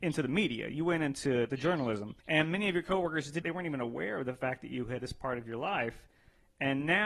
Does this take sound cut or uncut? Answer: cut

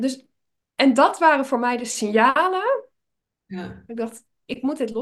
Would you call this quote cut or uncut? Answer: uncut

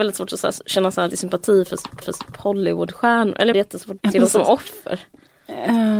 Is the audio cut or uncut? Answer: cut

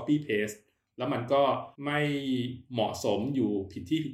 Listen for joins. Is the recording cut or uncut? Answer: cut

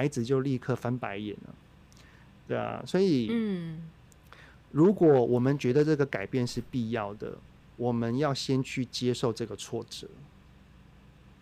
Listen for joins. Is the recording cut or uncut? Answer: uncut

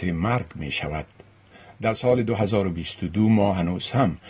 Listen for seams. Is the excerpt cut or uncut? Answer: uncut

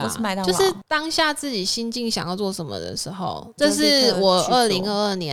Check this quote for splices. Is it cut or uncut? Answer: cut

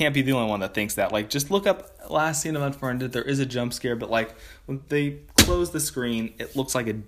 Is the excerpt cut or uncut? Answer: uncut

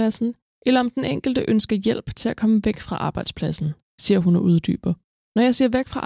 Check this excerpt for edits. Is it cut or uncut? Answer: uncut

